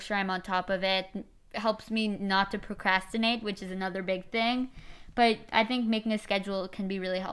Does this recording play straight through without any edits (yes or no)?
yes